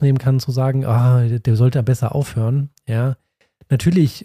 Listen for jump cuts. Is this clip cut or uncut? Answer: uncut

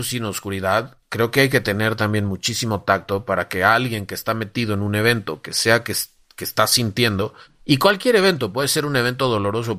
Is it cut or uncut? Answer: uncut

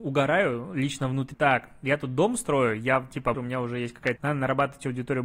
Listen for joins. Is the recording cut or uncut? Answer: cut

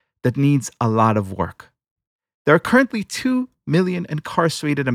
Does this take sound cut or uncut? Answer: uncut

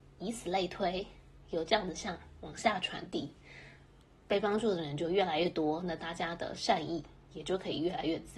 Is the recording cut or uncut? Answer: uncut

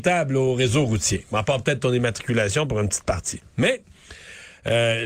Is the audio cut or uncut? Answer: uncut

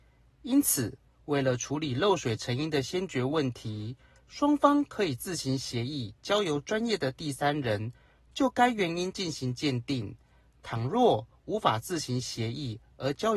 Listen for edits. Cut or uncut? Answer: uncut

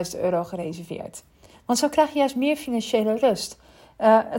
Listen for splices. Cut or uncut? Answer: cut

